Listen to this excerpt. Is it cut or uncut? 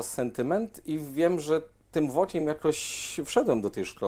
uncut